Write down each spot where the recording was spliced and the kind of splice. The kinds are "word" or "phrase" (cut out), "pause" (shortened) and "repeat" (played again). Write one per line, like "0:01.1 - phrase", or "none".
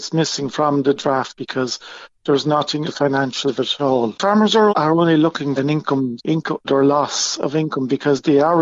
0:01.3 - word
0:02.8 - word
0:03.5 - word
0:03.8 - word
0:04.7 - word
0:05.6 - word
0:06.2 - word
0:06.6 - word